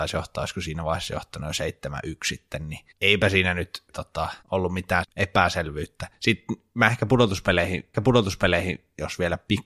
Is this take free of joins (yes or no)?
no